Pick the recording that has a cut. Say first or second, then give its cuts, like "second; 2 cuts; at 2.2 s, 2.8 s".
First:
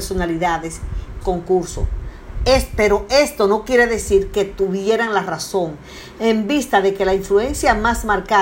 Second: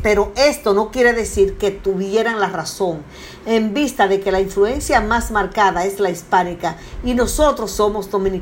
first; 1 cut; at 1.2 s